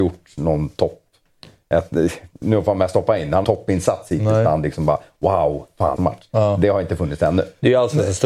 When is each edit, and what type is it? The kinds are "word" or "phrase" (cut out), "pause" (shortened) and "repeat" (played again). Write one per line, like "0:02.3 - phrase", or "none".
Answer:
0:03.4 - phrase
0:06.0 - phrase